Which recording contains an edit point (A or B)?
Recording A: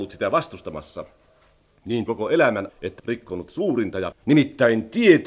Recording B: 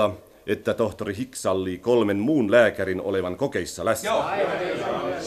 A